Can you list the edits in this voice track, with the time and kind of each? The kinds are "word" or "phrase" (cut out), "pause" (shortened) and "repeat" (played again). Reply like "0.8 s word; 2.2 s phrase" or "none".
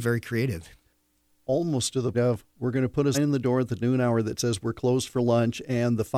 2.1 s word; 3.1 s word